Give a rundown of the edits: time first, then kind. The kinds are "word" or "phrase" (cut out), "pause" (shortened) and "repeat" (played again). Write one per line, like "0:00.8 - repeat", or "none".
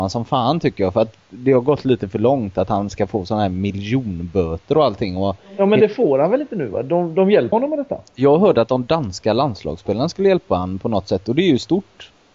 0:07.5 - word